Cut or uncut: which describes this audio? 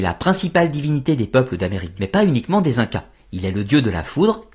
cut